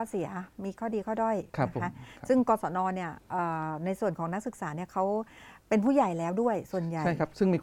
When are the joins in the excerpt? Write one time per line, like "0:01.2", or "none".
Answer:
0:01.5